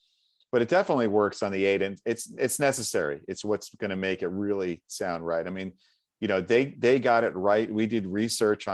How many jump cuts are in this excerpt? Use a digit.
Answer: 0